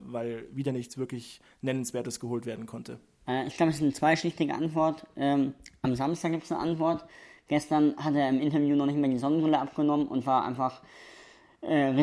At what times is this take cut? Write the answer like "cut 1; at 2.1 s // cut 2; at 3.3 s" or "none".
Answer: none